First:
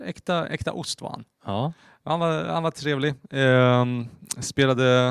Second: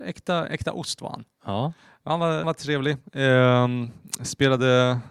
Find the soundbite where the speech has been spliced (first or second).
second